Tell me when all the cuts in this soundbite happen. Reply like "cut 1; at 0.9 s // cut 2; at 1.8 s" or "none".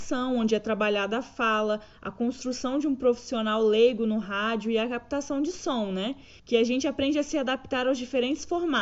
cut 1; at 6.4 s